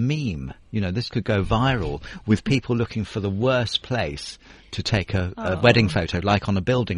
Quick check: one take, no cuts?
yes; 0 cuts

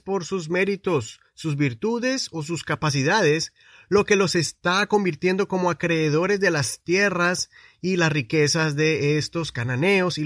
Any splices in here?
no; 0 cuts

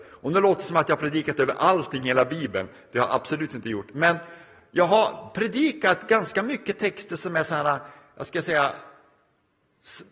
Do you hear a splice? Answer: no; 0 cuts

